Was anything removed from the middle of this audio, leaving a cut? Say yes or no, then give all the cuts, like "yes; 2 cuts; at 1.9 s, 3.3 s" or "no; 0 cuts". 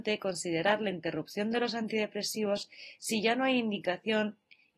no; 0 cuts